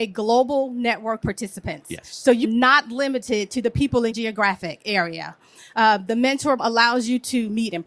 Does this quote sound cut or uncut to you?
cut